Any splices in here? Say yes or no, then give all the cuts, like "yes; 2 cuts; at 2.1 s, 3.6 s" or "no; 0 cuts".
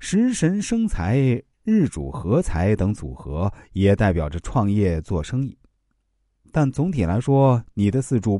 no; 0 cuts